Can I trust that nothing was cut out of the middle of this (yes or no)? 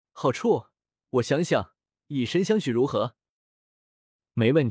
yes